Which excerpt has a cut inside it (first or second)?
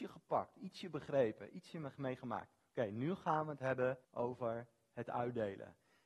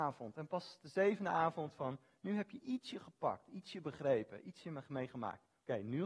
first